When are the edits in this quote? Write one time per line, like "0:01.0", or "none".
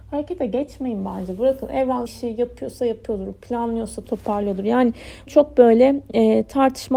0:02.1
0:04.0
0:05.3